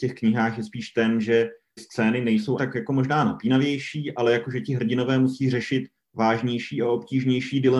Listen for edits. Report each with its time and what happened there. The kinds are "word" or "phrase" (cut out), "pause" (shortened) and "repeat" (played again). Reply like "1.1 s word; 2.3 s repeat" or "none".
1.8 s word; 2.6 s word

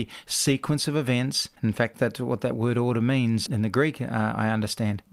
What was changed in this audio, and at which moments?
1.9 s word; 3.5 s word

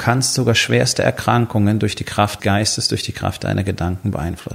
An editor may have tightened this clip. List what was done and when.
2.4 s word

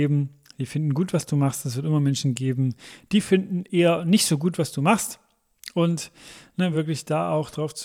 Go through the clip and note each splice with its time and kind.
none

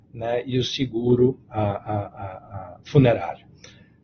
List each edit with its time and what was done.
1.4 s word

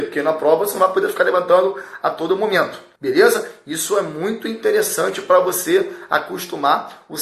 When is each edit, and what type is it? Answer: 3.0 s pause

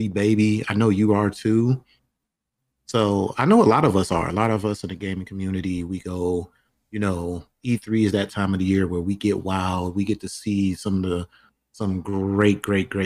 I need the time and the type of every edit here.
none

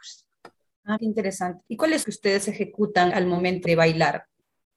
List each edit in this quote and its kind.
1.0 s word; 1.7 s pause; 2.0 s phrase; 3.1 s word; 3.6 s word

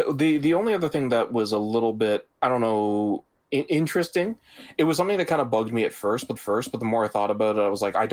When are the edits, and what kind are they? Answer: 2.3 s pause; 6.4 s repeat

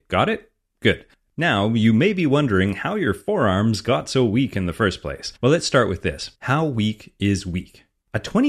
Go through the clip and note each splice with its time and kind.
1.1 s pause; 5.4 s pause; 6.4 s pause

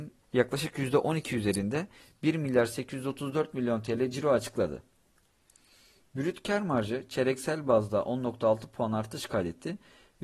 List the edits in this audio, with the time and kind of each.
none

